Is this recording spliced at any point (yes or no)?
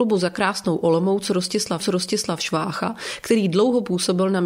yes